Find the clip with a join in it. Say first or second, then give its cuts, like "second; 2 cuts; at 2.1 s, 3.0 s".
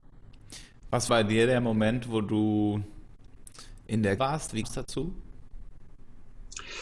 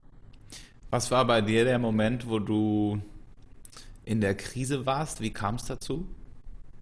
first; 3 cuts; at 1.1 s, 4.2 s, 4.6 s